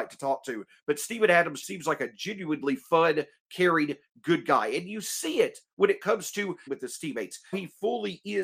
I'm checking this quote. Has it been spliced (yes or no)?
yes